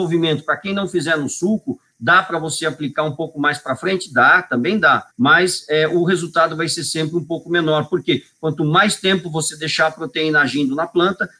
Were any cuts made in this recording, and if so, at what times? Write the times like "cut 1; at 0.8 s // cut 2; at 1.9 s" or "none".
cut 1; at 5.1 s

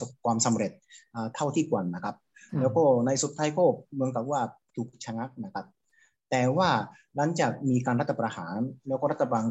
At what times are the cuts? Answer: none

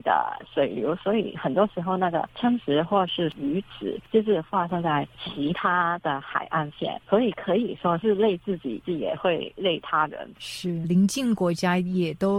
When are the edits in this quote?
cut 1; at 10.8 s

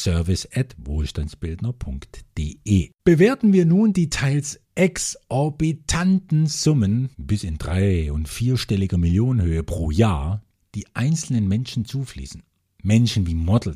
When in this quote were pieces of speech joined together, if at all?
cut 1; at 3.0 s // cut 2; at 4.6 s // cut 3; at 7.1 s // cut 4; at 10.5 s

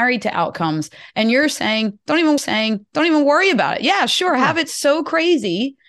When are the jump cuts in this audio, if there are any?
cut 1; at 2.4 s

